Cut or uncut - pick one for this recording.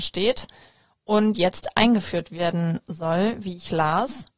uncut